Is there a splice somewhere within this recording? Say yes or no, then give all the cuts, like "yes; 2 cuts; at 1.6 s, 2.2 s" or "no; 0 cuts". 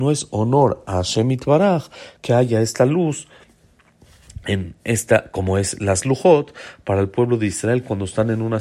yes; 1 cut; at 2.2 s